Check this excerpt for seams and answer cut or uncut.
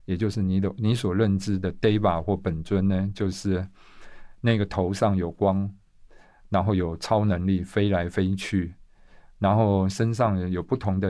uncut